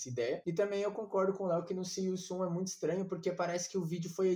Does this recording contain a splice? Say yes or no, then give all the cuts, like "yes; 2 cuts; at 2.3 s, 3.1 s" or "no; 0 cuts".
no; 0 cuts